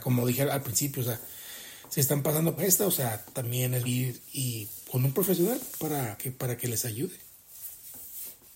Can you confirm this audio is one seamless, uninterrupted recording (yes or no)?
no